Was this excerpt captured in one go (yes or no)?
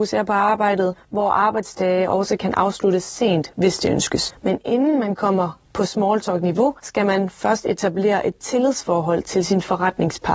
yes